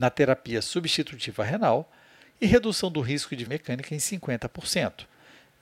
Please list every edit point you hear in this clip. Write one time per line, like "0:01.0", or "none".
0:03.5